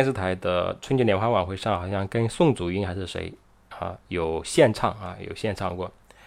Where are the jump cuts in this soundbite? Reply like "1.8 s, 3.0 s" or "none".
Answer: 4.0 s